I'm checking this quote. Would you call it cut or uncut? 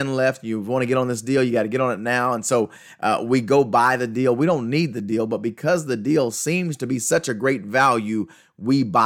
uncut